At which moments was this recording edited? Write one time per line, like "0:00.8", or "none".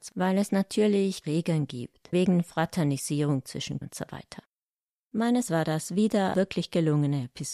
0:01.2
0:02.1
0:03.8
0:05.5
0:06.3